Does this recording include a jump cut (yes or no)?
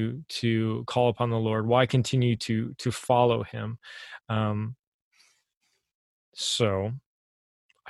no